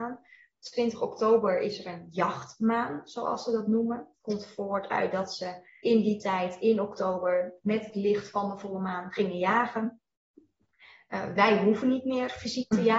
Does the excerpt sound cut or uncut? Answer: cut